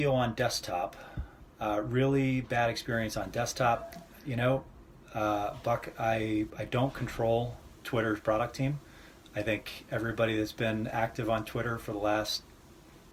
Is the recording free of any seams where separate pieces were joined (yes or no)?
yes